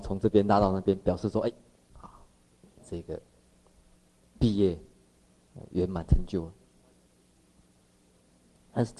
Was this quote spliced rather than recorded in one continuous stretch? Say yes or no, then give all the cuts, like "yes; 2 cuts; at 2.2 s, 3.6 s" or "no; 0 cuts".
no; 0 cuts